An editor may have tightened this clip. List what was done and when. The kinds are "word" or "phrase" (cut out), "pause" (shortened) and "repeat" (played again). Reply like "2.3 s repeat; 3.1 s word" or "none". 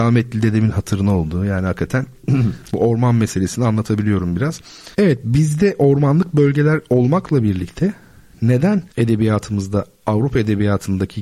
4.9 s pause; 8.9 s pause